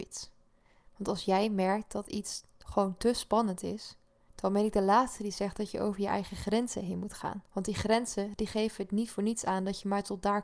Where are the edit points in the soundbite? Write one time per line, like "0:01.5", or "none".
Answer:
0:07.5